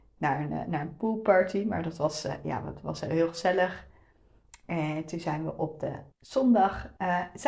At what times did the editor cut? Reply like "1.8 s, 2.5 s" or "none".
6.1 s